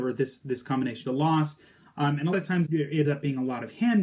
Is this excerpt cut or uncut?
cut